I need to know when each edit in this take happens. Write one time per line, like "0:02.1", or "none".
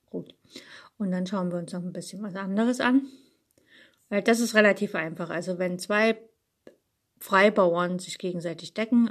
none